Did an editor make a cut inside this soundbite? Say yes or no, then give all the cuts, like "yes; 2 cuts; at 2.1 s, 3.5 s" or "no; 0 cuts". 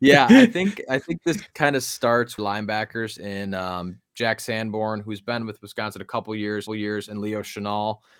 yes; 3 cuts; at 1.5 s, 2.4 s, 6.7 s